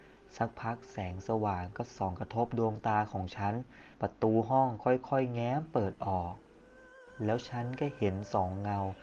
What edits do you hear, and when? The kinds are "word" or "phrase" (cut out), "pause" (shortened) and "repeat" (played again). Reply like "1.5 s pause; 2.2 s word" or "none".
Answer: 3.9 s pause